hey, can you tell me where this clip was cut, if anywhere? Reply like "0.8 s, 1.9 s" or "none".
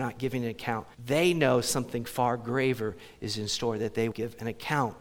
0.9 s, 4.1 s